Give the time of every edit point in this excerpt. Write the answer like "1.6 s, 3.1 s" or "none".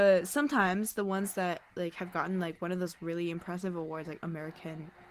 none